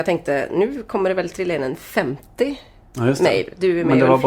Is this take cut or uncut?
uncut